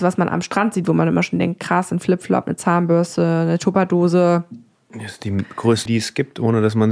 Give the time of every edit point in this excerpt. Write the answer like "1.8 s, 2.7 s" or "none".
5.9 s